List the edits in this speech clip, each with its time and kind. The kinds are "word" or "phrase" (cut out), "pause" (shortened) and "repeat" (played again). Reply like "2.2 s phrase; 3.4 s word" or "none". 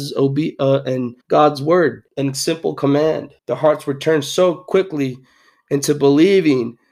1.2 s pause; 2.1 s pause; 3.4 s pause